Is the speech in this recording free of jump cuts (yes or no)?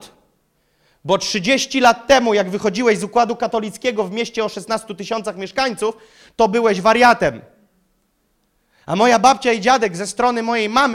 yes